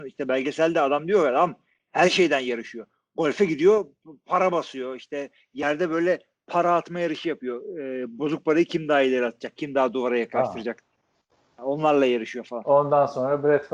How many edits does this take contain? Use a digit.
0